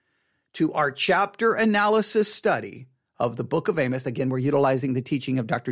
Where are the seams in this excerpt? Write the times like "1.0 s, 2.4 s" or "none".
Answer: none